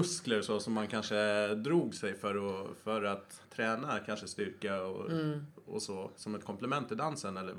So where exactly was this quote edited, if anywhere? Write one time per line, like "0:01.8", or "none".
0:03.4